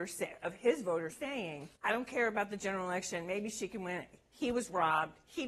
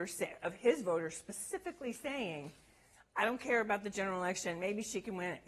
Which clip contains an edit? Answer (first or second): first